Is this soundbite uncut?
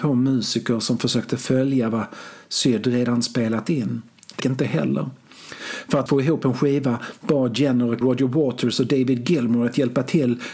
no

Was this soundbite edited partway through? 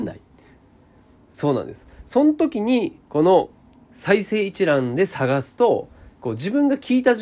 yes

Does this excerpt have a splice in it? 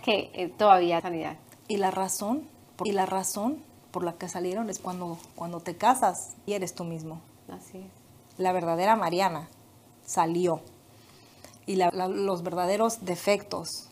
yes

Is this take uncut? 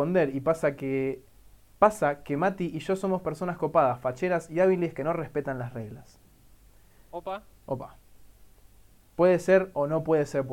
yes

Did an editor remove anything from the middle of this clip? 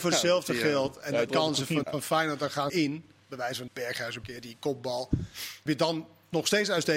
yes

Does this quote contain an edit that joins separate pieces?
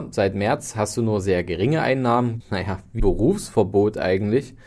yes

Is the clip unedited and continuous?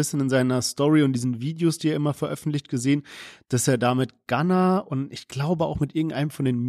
yes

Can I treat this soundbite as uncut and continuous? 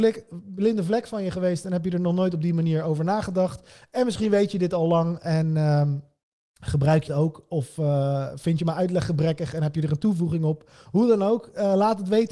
no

